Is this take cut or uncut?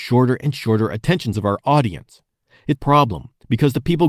cut